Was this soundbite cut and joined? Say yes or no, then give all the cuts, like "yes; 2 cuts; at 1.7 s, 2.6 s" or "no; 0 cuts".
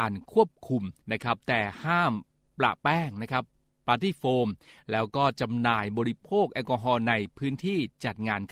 yes; 1 cut; at 1.0 s